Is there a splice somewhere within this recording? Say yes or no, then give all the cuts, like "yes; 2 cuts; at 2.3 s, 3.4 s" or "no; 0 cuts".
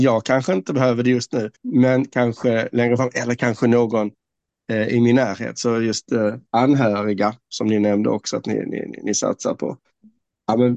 yes; 2 cuts; at 1.6 s, 6.5 s